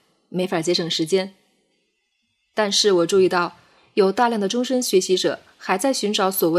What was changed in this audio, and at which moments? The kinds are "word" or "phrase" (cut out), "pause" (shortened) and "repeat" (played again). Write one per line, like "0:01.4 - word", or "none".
none